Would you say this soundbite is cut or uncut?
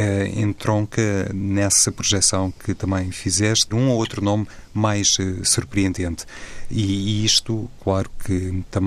cut